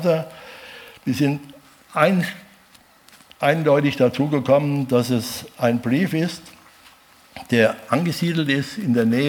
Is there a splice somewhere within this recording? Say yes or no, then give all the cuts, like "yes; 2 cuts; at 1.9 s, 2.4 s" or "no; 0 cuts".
no; 0 cuts